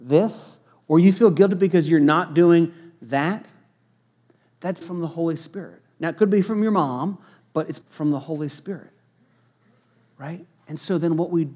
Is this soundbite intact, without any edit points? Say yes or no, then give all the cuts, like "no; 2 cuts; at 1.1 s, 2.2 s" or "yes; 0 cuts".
no; 2 cuts; at 4.8 s, 7.8 s